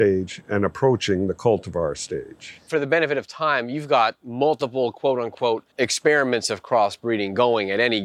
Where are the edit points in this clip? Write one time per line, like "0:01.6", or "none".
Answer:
0:05.7